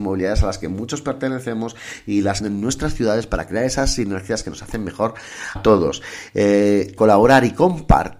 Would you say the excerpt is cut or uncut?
cut